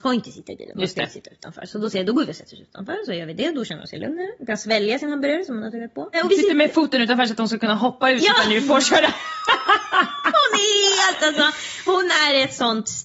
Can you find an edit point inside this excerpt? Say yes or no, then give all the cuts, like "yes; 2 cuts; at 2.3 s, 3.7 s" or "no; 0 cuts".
no; 0 cuts